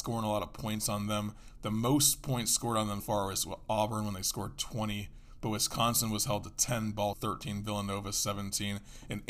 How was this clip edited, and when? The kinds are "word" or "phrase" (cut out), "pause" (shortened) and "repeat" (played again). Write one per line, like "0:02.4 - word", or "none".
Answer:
0:03.0 - word
0:07.1 - phrase